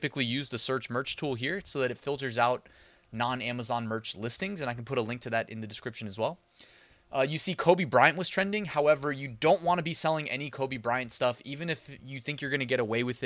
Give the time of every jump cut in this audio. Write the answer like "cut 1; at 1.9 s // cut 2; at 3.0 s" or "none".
none